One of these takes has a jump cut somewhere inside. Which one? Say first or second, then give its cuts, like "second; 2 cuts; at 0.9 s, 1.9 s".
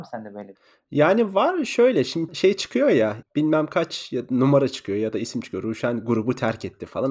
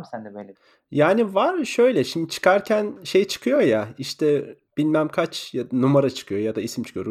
first; 2 cuts; at 2.3 s, 3.2 s